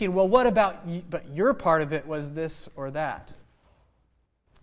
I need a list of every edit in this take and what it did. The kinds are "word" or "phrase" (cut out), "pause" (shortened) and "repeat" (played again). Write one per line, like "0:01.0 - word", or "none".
none